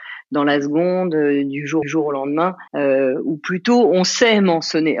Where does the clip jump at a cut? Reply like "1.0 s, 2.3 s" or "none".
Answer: 1.8 s, 2.7 s